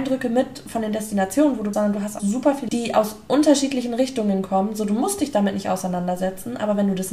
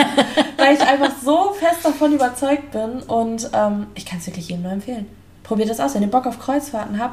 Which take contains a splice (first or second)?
first